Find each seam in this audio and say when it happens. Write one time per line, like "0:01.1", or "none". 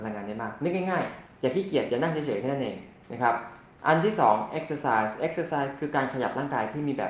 none